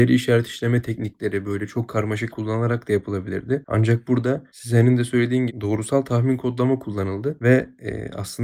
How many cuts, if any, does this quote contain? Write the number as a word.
three